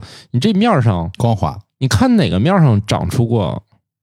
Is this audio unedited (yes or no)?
no